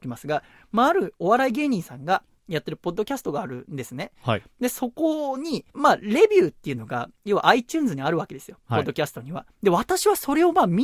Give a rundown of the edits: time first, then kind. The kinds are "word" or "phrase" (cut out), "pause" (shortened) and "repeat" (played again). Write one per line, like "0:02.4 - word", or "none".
0:05.7 - pause